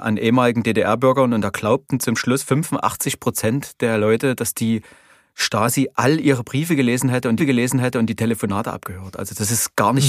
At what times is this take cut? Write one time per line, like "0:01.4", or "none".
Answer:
0:07.4